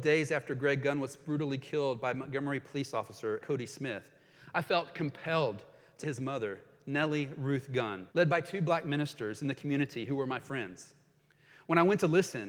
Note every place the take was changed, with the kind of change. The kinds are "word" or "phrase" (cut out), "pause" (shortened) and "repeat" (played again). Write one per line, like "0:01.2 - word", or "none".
0:03.4 - word
0:06.0 - word
0:08.1 - pause